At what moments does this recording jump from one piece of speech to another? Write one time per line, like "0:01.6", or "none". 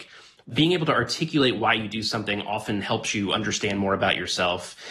none